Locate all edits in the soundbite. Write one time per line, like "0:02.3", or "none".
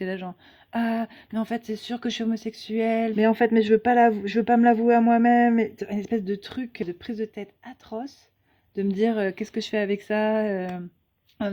0:03.1